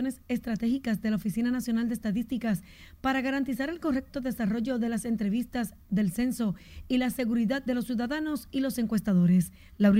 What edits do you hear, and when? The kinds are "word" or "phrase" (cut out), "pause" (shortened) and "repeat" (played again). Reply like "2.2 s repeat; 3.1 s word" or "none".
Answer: none